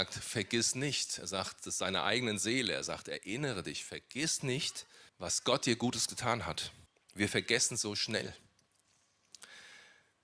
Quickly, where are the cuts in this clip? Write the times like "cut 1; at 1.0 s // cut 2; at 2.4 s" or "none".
cut 1; at 5.1 s // cut 2; at 6.9 s